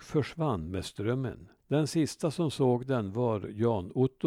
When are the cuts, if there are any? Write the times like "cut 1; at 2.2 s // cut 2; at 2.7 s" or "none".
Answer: cut 1; at 1.6 s